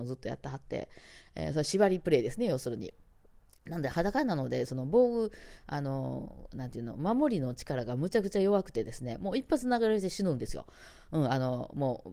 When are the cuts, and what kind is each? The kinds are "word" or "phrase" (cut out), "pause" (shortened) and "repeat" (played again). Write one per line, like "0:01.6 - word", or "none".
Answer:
none